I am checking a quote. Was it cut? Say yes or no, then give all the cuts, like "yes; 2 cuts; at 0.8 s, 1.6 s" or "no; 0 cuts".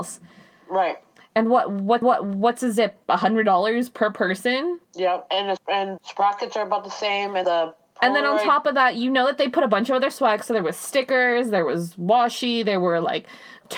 yes; 6 cuts; at 2.0 s, 3.0 s, 4.8 s, 5.6 s, 6.0 s, 7.4 s